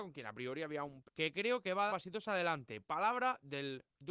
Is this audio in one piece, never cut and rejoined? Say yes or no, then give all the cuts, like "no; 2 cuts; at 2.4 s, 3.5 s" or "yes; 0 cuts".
no; 2 cuts; at 1.0 s, 1.9 s